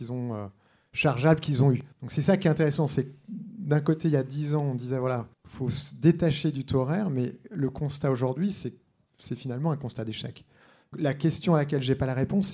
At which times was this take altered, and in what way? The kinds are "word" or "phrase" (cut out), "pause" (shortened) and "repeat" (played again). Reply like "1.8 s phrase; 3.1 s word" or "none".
1.9 s pause; 5.3 s pause; 10.9 s word